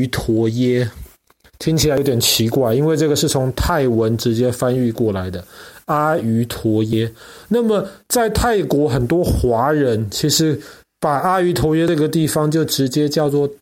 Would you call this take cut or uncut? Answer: uncut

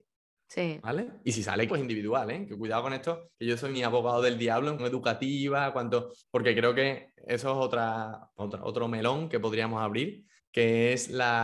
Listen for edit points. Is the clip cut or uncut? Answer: cut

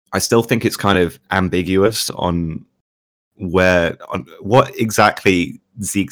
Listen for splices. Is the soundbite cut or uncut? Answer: uncut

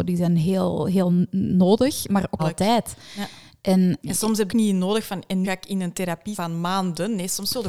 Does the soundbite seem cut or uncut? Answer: cut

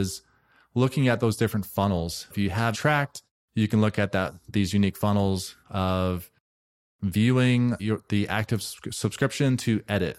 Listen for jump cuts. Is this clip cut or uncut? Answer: cut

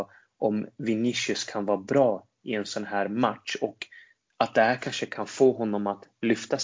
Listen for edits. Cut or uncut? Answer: uncut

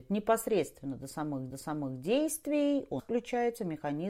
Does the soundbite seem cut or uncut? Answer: cut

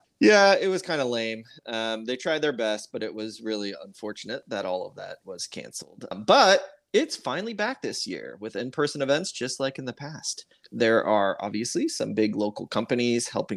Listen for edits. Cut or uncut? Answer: uncut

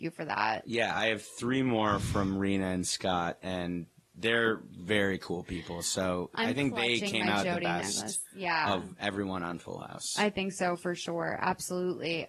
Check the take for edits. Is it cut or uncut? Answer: uncut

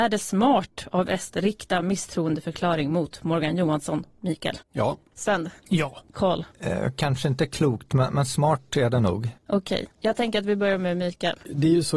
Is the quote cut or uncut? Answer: cut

